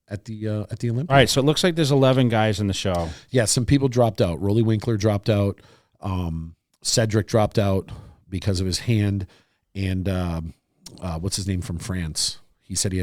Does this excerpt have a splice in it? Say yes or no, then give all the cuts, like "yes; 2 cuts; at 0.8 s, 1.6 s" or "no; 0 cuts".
no; 0 cuts